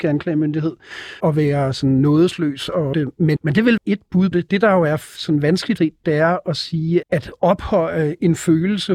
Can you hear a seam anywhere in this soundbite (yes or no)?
yes